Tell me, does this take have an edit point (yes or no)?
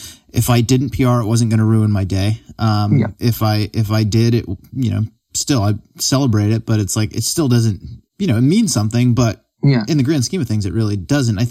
yes